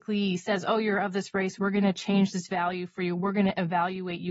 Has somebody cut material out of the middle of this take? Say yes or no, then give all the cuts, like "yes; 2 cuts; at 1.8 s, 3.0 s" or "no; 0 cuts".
no; 0 cuts